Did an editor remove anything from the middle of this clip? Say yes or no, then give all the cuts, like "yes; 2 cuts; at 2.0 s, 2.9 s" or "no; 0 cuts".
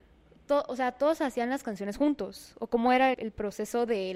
yes; 1 cut; at 3.1 s